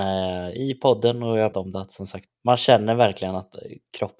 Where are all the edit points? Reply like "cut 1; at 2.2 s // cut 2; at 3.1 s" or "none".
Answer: cut 1; at 1.5 s // cut 2; at 2.3 s